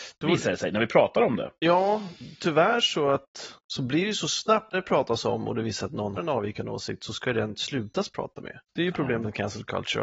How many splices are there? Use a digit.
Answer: 4